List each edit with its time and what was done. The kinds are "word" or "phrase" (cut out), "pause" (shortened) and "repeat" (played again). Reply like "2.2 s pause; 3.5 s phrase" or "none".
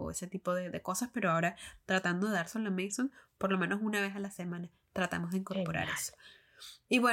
none